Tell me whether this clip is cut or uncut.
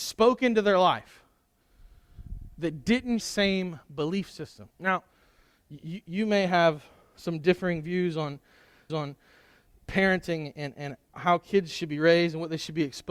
cut